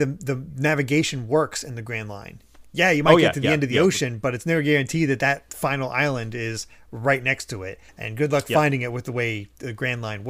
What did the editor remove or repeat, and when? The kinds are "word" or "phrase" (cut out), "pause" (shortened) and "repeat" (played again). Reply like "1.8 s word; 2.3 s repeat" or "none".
7.9 s pause